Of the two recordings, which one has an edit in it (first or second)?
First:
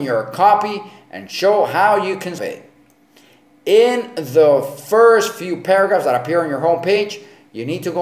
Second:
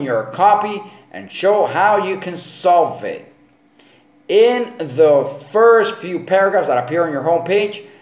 first